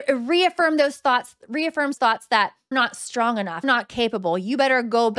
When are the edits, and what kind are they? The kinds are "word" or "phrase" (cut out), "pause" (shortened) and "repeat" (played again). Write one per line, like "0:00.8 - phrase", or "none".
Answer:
0:02.0 - word
0:02.7 - word
0:03.6 - word